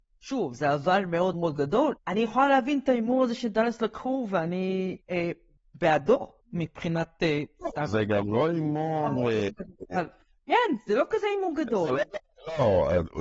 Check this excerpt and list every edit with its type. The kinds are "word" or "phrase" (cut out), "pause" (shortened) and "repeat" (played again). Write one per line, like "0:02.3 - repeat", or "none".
0:01.3 - word
0:02.0 - pause
0:05.0 - pause
0:06.4 - pause